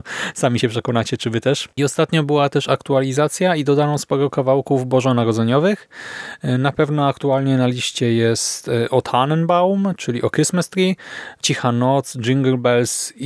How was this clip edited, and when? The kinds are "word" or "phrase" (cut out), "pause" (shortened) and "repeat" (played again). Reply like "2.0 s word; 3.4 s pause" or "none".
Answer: 1.7 s pause